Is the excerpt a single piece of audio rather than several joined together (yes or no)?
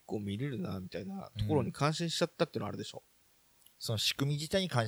no